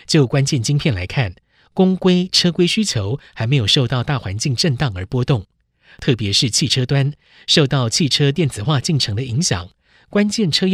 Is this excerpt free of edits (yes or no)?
yes